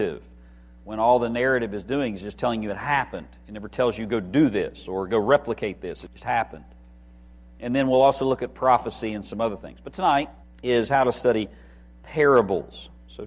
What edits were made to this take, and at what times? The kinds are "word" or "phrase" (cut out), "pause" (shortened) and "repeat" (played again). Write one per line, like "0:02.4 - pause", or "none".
0:10.4 - pause